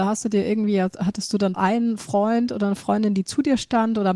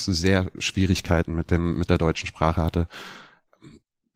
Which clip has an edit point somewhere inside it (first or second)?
first